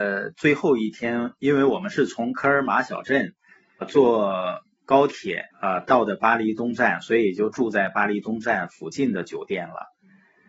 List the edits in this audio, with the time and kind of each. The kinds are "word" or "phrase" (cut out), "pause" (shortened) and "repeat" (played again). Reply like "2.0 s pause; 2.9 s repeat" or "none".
3.8 s word; 5.5 s pause